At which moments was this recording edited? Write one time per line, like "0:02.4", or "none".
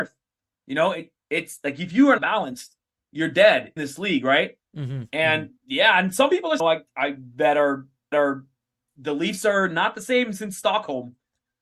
0:02.2
0:03.8
0:05.6
0:06.6
0:08.1